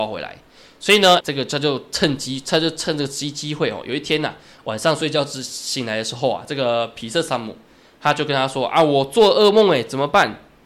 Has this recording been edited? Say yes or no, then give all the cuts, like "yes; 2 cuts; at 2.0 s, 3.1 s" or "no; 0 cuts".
yes; 1 cut; at 1.2 s